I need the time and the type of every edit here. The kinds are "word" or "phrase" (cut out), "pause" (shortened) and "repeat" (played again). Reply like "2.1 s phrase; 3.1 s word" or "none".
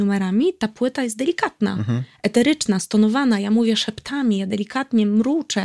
none